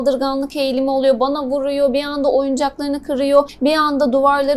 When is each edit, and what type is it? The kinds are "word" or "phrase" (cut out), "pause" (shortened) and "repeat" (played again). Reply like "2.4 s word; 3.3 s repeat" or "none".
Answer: none